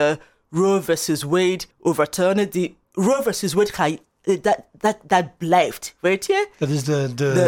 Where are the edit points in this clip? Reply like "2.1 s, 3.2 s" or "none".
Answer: 1.7 s, 2.8 s